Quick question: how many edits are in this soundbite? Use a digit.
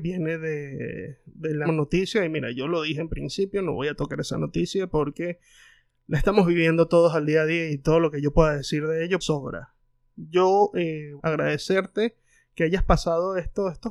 3